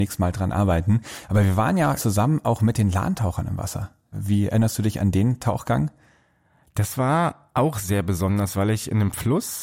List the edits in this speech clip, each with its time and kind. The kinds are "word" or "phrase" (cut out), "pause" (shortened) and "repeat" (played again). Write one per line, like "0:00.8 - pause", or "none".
0:02.0 - word